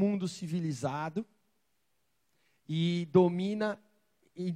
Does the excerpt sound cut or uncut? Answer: uncut